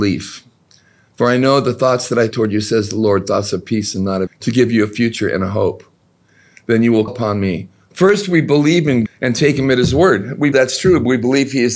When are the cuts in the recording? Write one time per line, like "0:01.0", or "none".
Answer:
0:02.3
0:04.3
0:07.1
0:09.1
0:10.5

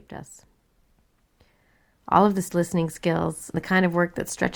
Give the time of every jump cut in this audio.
0:02.5
0:03.5

